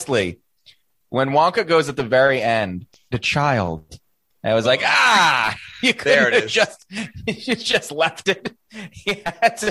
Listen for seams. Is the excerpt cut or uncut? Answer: cut